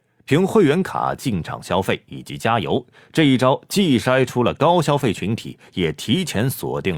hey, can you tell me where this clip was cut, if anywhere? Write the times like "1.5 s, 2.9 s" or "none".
none